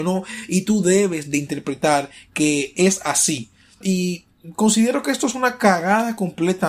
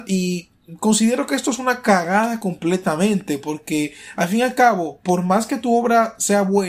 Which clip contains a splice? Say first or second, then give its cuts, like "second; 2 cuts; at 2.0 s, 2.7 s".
first; 1 cut; at 3.8 s